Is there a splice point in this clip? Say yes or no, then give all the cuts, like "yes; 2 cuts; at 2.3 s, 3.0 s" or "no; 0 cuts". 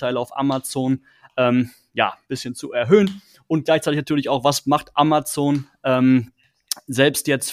no; 0 cuts